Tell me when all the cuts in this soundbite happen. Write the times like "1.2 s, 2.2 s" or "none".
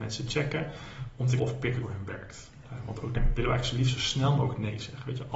1.4 s, 1.8 s, 3.1 s